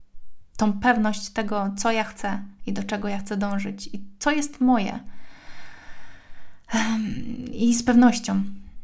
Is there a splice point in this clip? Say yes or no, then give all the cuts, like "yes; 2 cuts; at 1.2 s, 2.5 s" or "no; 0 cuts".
no; 0 cuts